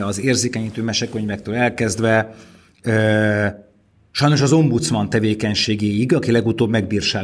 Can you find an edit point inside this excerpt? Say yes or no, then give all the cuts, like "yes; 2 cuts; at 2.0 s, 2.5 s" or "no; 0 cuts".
no; 0 cuts